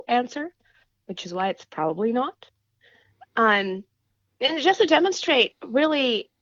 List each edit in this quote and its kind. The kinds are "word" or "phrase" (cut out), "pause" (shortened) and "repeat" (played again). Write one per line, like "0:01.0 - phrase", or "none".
none

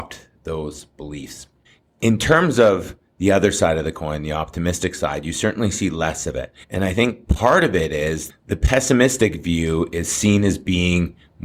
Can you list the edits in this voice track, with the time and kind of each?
0:01.6 - pause
0:06.6 - pause
0:08.3 - word

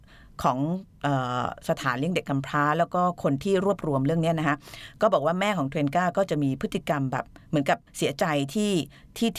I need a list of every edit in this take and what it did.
0:07.9 - pause

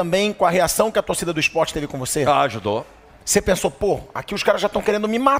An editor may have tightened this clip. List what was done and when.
none

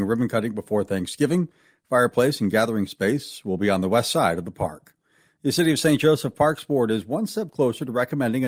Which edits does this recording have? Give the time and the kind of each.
none

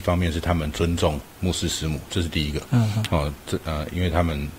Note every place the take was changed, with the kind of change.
none

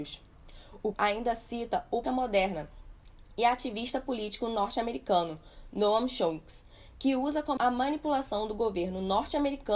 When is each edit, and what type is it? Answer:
0:00.9 - word
0:02.0 - phrase
0:07.6 - word

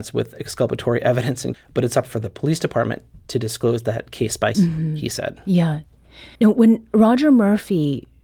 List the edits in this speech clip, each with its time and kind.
0:01.5 - word
0:04.5 - word
0:06.4 - pause

